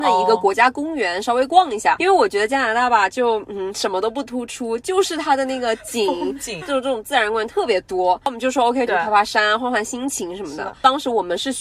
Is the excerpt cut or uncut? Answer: cut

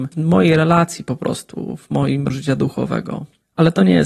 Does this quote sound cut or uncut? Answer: cut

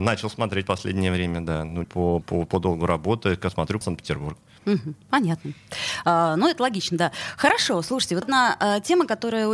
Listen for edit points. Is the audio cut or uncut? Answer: cut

